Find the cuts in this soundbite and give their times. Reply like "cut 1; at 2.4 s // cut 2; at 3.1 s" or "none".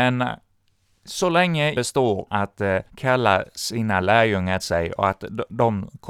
cut 1; at 1.7 s // cut 2; at 2.3 s // cut 3; at 2.9 s // cut 4; at 4.6 s